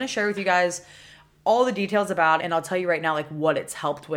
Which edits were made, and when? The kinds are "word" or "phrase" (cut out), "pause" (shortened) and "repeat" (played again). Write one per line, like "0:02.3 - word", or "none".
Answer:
0:02.4 - word